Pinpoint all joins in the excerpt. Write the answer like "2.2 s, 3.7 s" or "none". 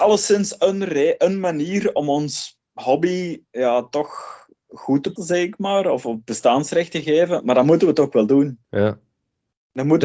2.7 s, 5.2 s, 8.6 s